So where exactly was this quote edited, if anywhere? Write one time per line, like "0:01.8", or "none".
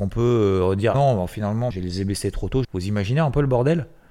0:00.9
0:01.7
0:02.6